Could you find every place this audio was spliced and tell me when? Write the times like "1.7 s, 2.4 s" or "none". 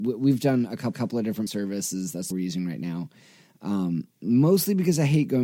0.9 s, 1.5 s, 2.3 s, 4.1 s